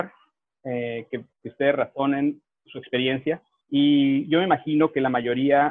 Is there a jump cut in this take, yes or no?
no